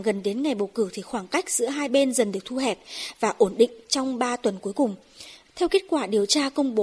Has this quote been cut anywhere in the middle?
no; 0 cuts

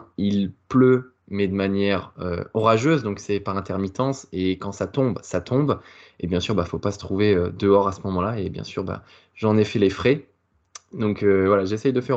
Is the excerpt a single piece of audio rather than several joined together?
yes; 0 cuts

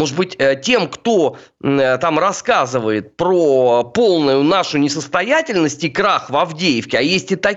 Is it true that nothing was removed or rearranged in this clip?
yes; 0 cuts

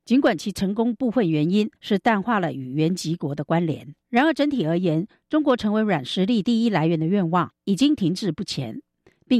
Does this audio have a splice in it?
yes; 3 cuts; at 1.8 s, 4.0 s, 7.6 s

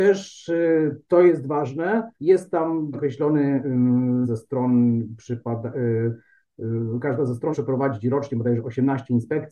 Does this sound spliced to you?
yes; 4 cuts; at 2.1 s, 2.9 s, 4.2 s, 7.5 s

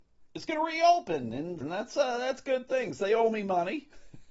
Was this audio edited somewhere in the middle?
yes; 1 cut; at 1.6 s

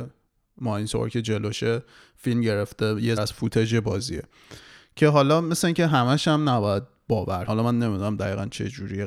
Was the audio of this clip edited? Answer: yes; 2 cuts; at 3.2 s, 7.5 s

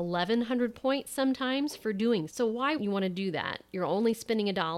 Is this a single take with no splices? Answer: no; 2 cuts; at 2.3 s, 2.8 s

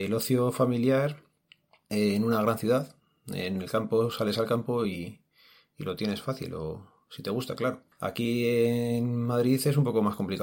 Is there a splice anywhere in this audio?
no; 0 cuts

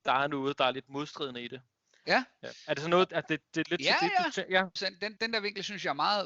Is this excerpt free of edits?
no; 3 cuts; at 2.4 s, 4.8 s, 5.2 s

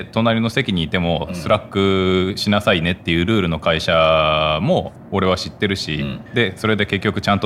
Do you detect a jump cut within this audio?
yes; 1 cut; at 6.3 s

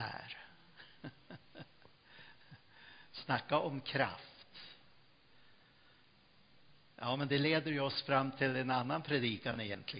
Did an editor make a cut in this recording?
no; 0 cuts

